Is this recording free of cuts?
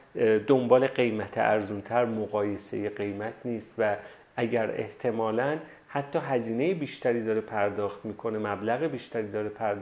yes; 0 cuts

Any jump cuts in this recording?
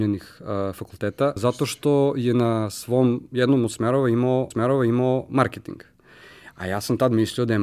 yes; 2 cuts; at 1.4 s, 4.5 s

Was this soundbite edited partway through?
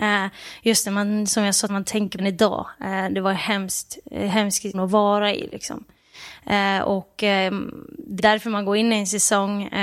yes; 4 cuts; at 1.7 s, 2.2 s, 4.7 s, 8.2 s

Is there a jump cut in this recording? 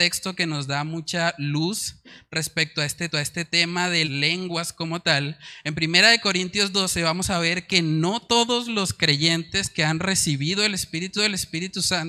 yes; 3 cuts; at 3.1 s, 4.0 s, 11.2 s

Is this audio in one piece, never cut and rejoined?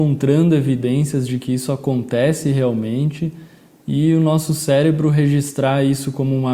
yes; 0 cuts

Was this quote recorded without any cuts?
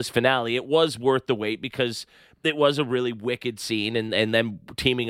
yes; 0 cuts

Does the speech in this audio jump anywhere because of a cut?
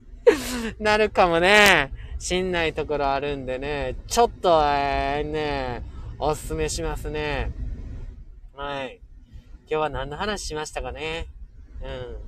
no; 0 cuts

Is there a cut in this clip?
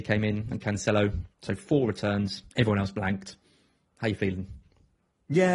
yes; 2 cuts; at 1.3 s, 2.5 s

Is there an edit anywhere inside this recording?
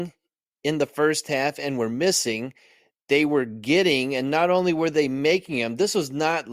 no; 0 cuts

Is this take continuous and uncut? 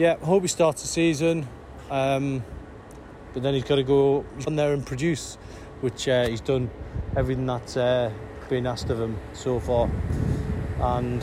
no; 1 cut; at 4.5 s

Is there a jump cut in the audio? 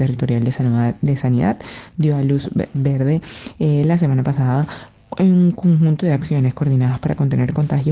no; 0 cuts

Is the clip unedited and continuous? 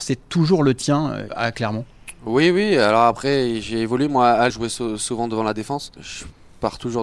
no; 2 cuts; at 1.3 s, 4.5 s

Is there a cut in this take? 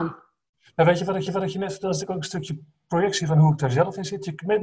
yes; 1 cut; at 1.3 s

